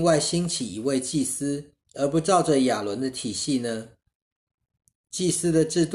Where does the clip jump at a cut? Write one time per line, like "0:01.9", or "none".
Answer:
0:01.8